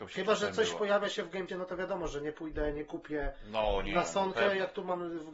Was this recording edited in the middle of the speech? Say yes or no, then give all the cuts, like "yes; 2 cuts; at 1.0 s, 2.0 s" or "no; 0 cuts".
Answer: yes; 1 cut; at 1.5 s